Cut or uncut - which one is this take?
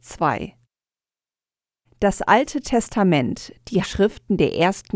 cut